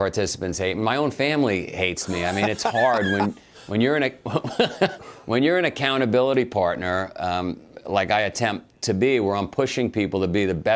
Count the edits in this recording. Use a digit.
0